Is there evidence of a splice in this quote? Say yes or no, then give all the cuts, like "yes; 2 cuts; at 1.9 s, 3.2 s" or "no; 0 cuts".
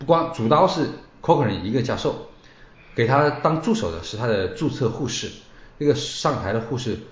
no; 0 cuts